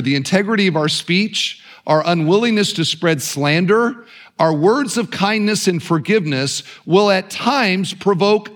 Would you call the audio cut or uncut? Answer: uncut